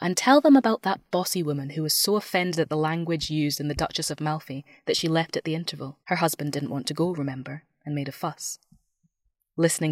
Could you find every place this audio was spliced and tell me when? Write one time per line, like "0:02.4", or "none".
0:06.0